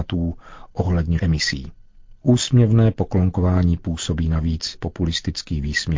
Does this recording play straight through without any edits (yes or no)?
no